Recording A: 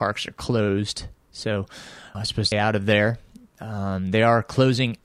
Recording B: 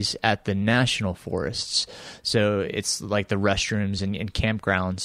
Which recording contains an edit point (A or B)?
A